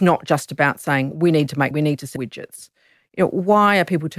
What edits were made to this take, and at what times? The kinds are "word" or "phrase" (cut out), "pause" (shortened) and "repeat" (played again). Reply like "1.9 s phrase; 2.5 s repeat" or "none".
1.1 s word; 1.7 s word; 2.2 s word